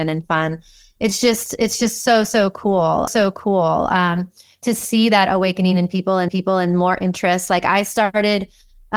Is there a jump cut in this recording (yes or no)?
yes